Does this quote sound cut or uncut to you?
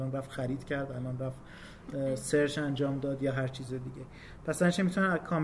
uncut